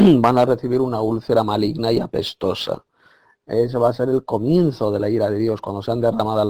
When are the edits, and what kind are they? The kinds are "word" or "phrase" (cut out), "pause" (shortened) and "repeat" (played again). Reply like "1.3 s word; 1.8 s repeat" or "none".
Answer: none